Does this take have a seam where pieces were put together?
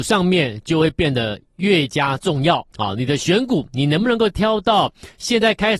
yes; 1 cut; at 2.7 s

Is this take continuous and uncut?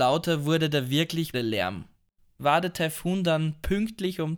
no; 2 cuts; at 1.3 s, 2.4 s

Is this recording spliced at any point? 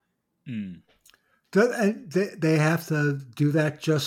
no; 0 cuts

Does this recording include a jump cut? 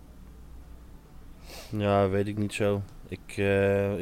no; 0 cuts

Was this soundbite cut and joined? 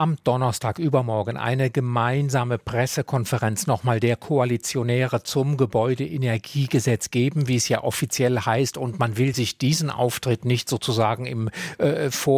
no; 0 cuts

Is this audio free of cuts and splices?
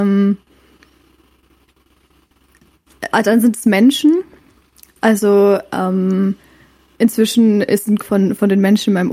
no; 1 cut; at 8.0 s

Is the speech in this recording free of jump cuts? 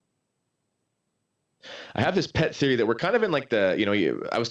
yes; 0 cuts

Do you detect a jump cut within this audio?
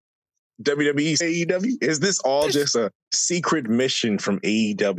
yes; 1 cut; at 1.2 s

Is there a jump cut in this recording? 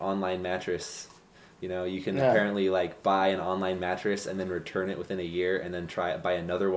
no; 0 cuts

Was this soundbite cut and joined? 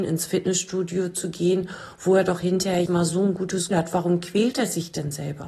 yes; 2 cuts; at 2.9 s, 3.7 s

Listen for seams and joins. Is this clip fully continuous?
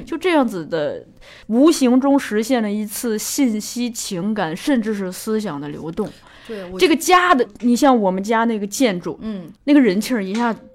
no; 3 cuts; at 1.4 s, 7.5 s, 9.6 s

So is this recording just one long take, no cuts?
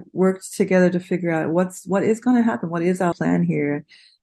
no; 1 cut; at 3.1 s

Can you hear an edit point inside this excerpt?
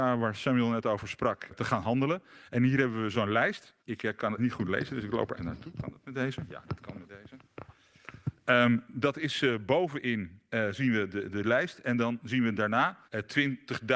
yes; 6 cuts; at 1.5 s, 3.1 s, 3.8 s, 4.4 s, 5.4 s, 13.0 s

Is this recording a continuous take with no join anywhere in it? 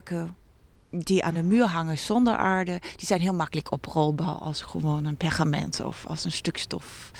yes; 0 cuts

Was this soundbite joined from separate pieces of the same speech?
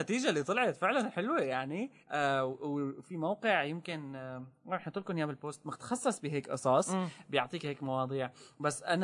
yes; 1 cut; at 2.0 s

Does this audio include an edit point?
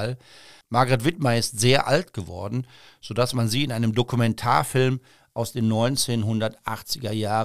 no; 0 cuts

